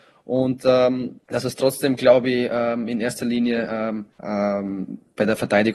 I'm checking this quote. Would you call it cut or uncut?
cut